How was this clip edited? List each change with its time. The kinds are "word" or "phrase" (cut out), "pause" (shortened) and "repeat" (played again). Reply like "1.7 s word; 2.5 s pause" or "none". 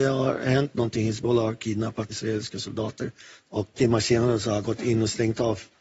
2.1 s word; 3.7 s word; 4.6 s word